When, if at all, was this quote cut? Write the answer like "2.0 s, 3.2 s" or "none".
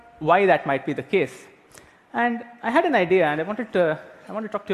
none